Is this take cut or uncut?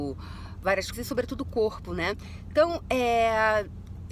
cut